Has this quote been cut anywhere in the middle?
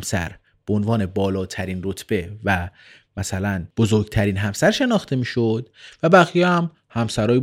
no; 0 cuts

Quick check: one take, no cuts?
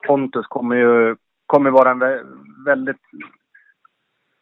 yes; 0 cuts

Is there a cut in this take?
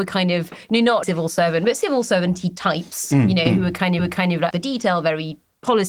yes; 3 cuts; at 1.0 s, 4.0 s, 4.5 s

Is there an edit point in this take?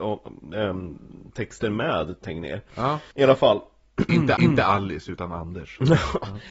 yes; 2 cuts; at 3.1 s, 4.4 s

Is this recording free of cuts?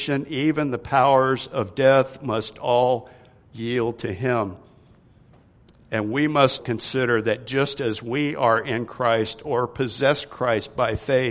no; 1 cut; at 6.6 s

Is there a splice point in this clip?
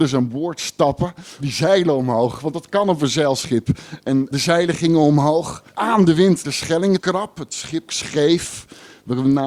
yes; 6 cuts; at 1.4 s, 4.3 s, 5.7 s, 6.4 s, 7.0 s, 7.9 s

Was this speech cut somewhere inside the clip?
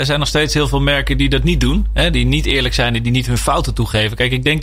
no; 0 cuts

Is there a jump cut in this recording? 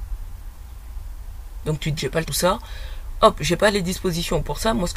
yes; 2 cuts; at 2.0 s, 2.3 s

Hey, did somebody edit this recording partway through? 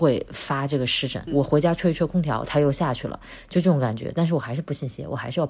yes; 1 cut; at 1.3 s

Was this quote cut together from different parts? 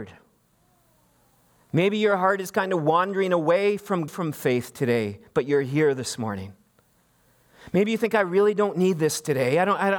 yes; 1 cut; at 4.1 s

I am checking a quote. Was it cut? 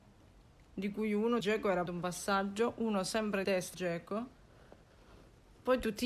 yes; 4 cuts; at 1.4 s, 1.9 s, 3.4 s, 3.7 s

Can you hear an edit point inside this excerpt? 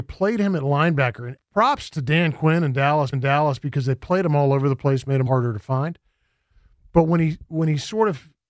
yes; 3 cuts; at 1.4 s, 3.1 s, 5.3 s

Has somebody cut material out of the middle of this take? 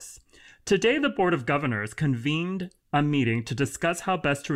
yes; 1 cut; at 2.8 s

